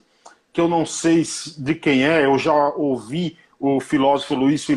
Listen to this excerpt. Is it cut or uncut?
uncut